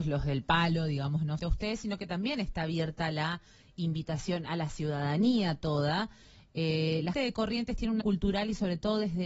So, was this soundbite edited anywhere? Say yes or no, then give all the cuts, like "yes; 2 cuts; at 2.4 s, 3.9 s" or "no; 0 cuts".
yes; 3 cuts; at 1.4 s, 7.1 s, 8.0 s